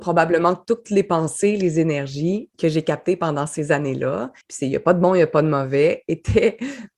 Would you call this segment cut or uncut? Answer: cut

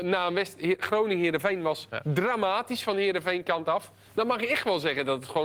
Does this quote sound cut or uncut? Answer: uncut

